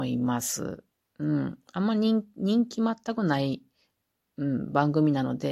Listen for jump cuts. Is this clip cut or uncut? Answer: uncut